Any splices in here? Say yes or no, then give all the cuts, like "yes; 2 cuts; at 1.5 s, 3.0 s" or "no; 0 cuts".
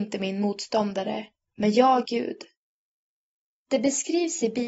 yes; 2 cuts; at 1.4 s, 2.0 s